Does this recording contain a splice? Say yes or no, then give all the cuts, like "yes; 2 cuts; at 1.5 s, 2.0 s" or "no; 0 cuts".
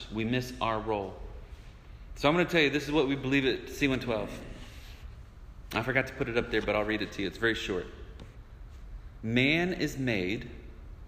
no; 0 cuts